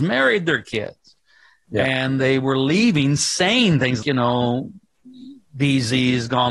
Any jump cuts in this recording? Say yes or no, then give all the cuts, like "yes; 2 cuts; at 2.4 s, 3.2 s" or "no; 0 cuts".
yes; 1 cut; at 4.0 s